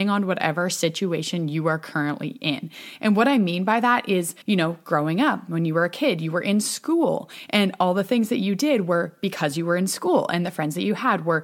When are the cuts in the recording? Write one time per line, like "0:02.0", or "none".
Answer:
0:04.4